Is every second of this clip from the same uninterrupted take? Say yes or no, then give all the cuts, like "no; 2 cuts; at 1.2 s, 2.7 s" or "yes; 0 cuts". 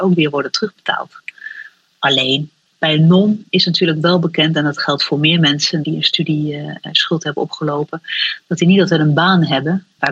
yes; 0 cuts